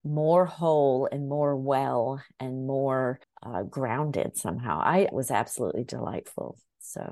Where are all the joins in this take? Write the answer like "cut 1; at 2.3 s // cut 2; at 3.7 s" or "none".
cut 1; at 3.2 s // cut 2; at 5.1 s